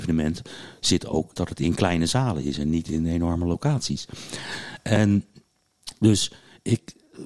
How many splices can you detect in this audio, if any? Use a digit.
1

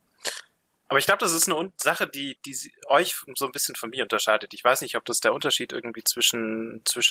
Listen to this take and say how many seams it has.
1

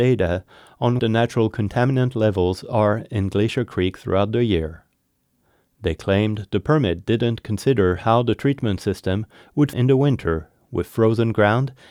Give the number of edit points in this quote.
2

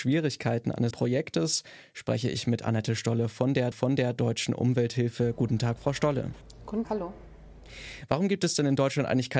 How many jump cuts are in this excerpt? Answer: 3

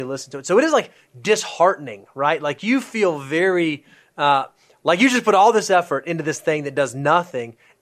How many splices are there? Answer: 0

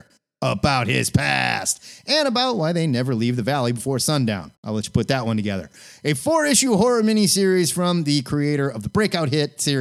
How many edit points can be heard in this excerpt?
1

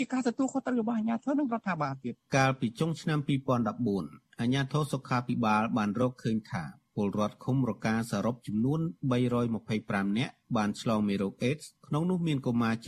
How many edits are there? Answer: 2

